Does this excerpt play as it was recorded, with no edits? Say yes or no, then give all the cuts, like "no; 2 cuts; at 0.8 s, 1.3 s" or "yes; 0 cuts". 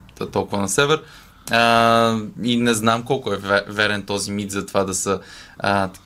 yes; 0 cuts